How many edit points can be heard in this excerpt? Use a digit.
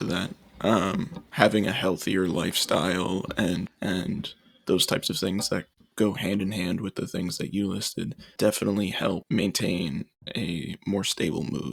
2